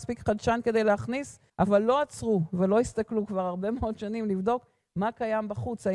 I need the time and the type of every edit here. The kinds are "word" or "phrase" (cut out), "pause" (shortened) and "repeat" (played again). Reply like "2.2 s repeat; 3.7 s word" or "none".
1.5 s pause